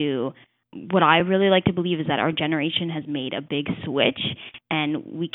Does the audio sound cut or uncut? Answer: uncut